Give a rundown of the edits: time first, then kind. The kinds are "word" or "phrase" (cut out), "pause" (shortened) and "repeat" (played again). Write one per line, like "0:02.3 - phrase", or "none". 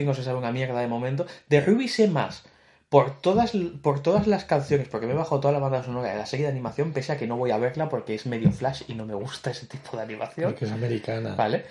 none